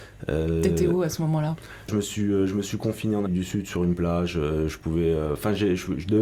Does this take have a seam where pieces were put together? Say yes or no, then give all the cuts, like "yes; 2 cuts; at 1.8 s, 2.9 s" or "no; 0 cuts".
yes; 2 cuts; at 1.9 s, 3.3 s